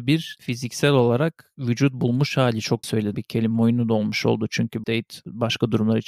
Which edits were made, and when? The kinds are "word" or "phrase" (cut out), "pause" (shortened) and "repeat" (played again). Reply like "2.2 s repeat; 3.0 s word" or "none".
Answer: 2.8 s word; 3.1 s word; 4.8 s word